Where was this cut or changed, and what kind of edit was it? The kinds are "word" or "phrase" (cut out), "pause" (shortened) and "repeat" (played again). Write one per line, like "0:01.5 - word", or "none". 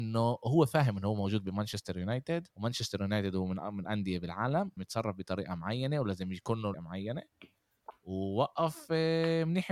0:02.5 - pause
0:03.9 - word
0:04.8 - word
0:06.7 - phrase